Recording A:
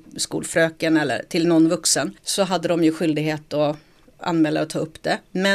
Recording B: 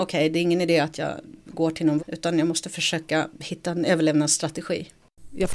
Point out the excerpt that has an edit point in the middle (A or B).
B